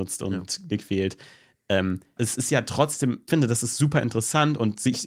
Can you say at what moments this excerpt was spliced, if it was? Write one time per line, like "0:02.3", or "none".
0:02.2
0:03.3